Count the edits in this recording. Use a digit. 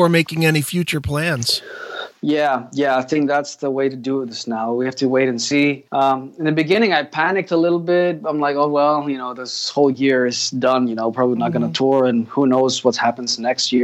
1